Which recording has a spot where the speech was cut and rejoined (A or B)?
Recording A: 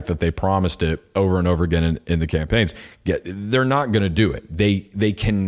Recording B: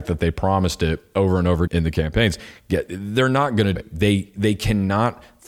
B